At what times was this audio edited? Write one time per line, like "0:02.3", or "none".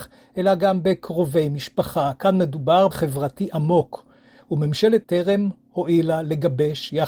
0:02.9
0:05.0